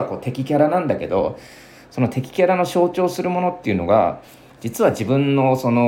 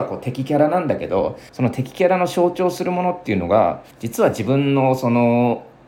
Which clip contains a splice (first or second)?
second